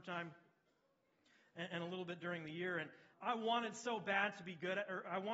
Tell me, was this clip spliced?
yes; 1 cut; at 3.1 s

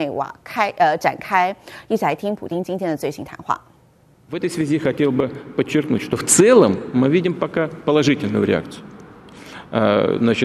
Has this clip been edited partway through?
no; 0 cuts

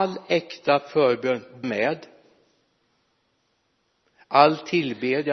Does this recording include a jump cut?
yes; 1 cut; at 1.6 s

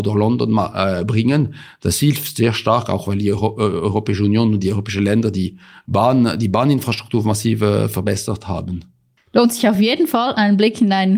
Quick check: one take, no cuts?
yes; 0 cuts

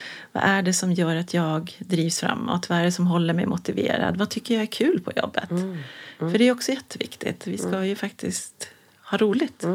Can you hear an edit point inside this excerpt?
no; 0 cuts

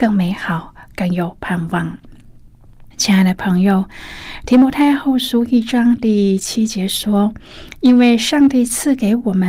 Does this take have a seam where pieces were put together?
yes; 1 cut; at 2.9 s

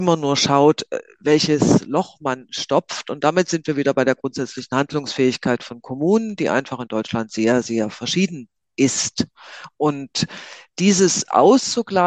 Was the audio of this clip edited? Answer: no; 0 cuts

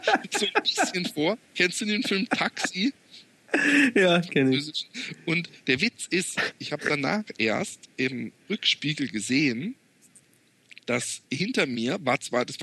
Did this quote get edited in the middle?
no; 0 cuts

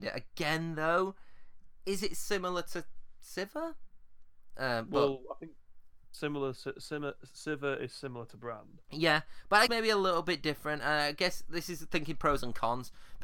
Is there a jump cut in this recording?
yes; 2 cuts; at 8.8 s, 9.7 s

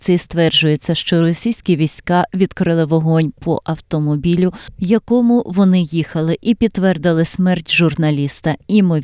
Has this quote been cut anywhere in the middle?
no; 0 cuts

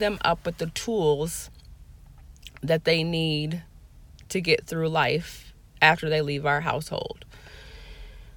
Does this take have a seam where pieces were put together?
no; 0 cuts

